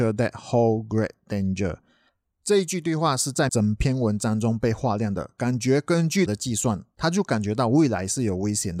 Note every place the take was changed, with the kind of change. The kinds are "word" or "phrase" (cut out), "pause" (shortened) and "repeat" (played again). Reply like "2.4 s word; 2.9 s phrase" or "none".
3.5 s word; 6.3 s word